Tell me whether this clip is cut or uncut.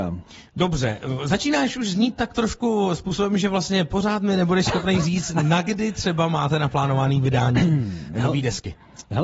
uncut